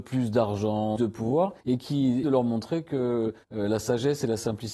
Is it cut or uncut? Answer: cut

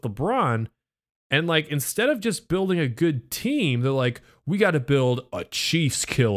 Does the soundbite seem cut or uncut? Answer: uncut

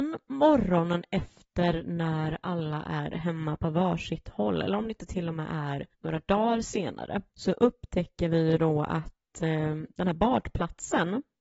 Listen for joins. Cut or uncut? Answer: cut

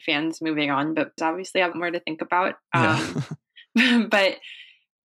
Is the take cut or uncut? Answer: cut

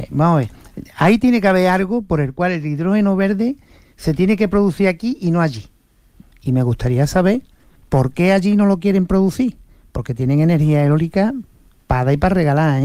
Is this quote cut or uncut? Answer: uncut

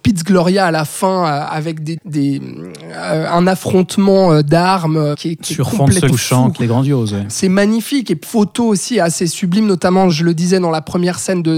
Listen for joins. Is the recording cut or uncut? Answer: cut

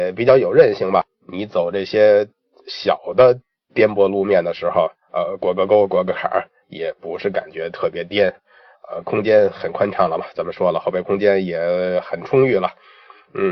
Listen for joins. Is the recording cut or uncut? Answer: uncut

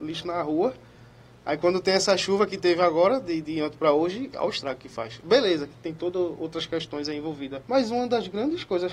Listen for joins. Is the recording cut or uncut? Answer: cut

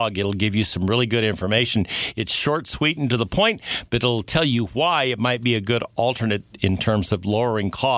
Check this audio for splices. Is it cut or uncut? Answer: uncut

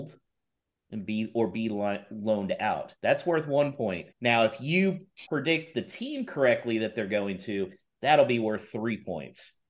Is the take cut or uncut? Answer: cut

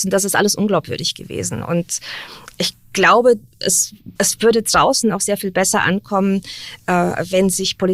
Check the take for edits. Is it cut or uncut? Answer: cut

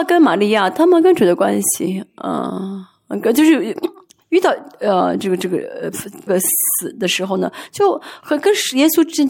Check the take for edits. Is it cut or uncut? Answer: cut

